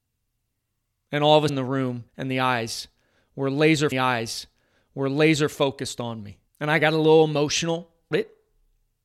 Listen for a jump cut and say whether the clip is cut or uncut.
cut